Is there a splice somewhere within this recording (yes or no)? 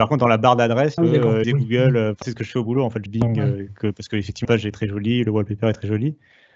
yes